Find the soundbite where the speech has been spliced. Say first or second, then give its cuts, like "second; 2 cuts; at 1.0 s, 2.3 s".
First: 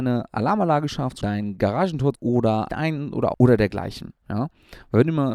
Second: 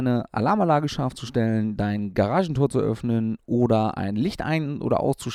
first; 4 cuts; at 1.2 s, 2.1 s, 2.7 s, 3.3 s